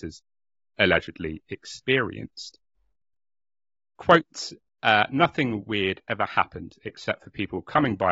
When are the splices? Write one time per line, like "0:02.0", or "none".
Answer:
none